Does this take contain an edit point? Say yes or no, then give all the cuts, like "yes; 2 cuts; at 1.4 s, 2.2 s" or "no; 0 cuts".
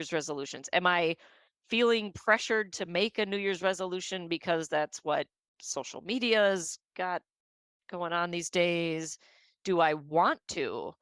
no; 0 cuts